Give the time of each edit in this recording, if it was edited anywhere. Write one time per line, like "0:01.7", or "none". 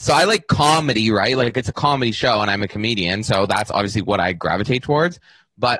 none